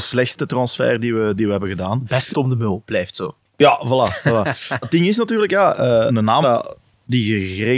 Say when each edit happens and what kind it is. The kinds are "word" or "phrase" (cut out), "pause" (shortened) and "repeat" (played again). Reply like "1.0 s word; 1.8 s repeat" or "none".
2.3 s word; 4.8 s word; 6.1 s word; 6.4 s word